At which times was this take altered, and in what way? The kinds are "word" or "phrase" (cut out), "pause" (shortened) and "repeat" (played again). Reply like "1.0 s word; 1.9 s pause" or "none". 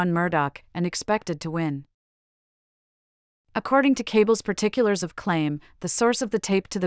none